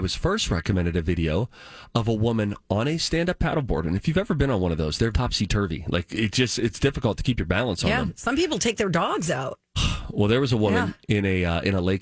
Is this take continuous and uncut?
no; 1 cut; at 5.1 s

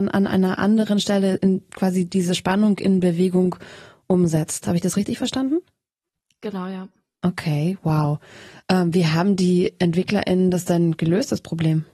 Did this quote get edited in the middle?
no; 0 cuts

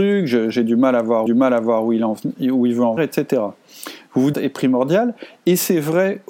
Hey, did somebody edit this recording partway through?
yes; 3 cuts; at 1.3 s, 3.0 s, 4.3 s

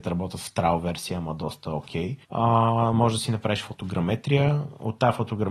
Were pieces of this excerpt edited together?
yes; 1 cut; at 2.2 s

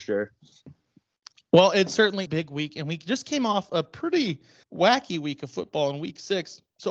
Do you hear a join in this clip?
yes; 2 cuts; at 2.3 s, 4.6 s

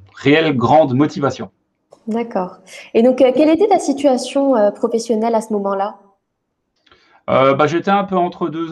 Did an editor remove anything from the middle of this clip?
no; 0 cuts

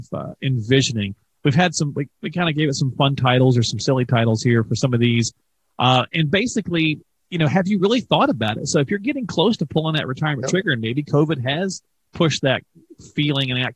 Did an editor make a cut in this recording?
no; 0 cuts

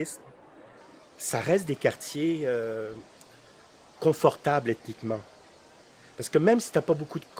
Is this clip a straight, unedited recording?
yes; 0 cuts

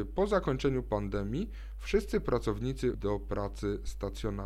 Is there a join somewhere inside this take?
yes; 1 cut; at 2.9 s

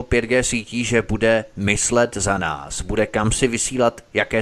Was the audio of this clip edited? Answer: no; 0 cuts

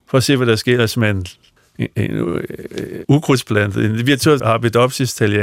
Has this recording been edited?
yes; 3 cuts; at 1.6 s, 3.0 s, 4.4 s

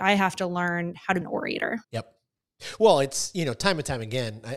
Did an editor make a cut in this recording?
yes; 2 cuts; at 1.2 s, 1.8 s

